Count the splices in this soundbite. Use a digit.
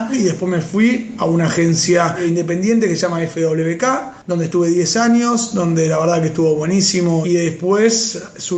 1